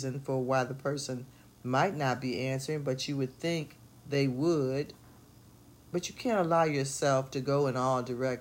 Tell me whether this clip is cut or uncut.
uncut